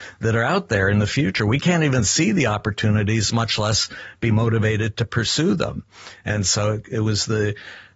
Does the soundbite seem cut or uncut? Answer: uncut